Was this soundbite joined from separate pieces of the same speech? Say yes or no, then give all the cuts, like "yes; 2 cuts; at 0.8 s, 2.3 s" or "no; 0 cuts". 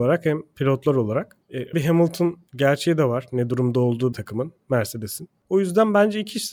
yes; 2 cuts; at 1.7 s, 4.1 s